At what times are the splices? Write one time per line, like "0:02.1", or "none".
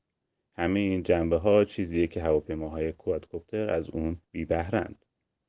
0:04.2

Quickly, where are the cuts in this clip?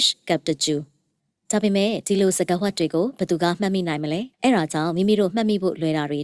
0:01.2
0:04.3

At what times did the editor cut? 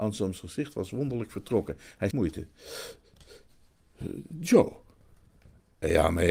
0:02.1

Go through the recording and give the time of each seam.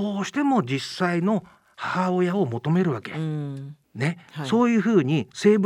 0:03.8

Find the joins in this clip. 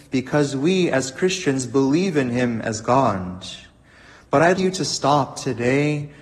0:04.6

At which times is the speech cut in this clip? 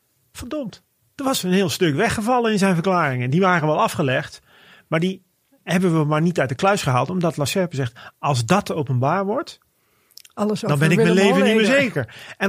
0:06.6

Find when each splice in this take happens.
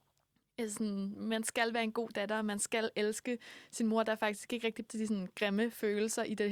0:04.9

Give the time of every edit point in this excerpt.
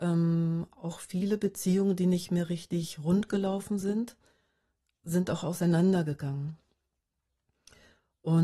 none

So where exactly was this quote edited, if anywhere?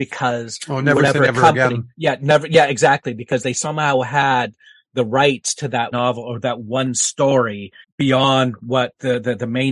0:05.9
0:07.8

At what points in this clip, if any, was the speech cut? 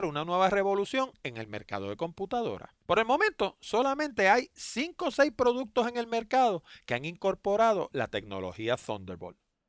0:02.8

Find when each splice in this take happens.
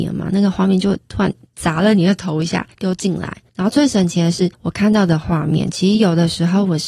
0:04.5

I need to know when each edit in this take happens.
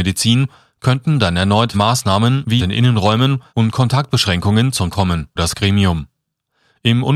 0:01.7
0:02.6
0:03.5
0:04.9
0:05.4

